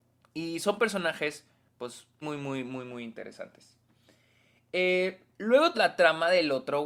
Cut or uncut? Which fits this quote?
cut